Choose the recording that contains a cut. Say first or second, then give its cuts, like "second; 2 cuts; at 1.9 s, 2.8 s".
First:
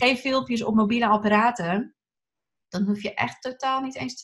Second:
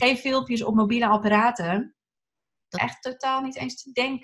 second; 1 cut; at 2.7 s